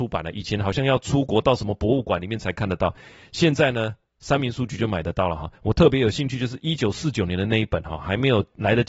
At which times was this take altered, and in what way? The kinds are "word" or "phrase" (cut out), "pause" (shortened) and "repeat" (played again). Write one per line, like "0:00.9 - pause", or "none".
0:05.6 - pause